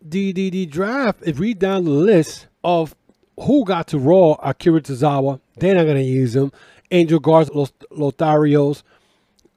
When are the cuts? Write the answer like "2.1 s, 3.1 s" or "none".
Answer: 1.3 s, 2.5 s, 7.5 s